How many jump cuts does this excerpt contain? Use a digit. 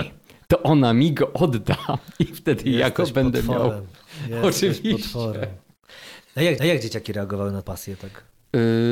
2